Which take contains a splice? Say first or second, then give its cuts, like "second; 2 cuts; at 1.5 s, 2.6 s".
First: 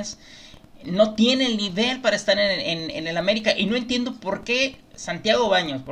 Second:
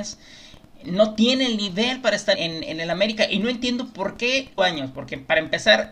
second; 2 cuts; at 2.3 s, 4.6 s